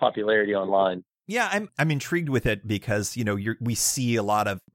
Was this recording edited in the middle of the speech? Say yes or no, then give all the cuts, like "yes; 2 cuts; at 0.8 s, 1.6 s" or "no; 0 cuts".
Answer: no; 0 cuts